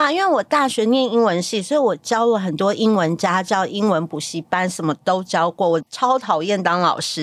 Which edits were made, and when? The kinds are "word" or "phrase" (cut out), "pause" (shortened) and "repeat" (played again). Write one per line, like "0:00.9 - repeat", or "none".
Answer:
0:05.9 - pause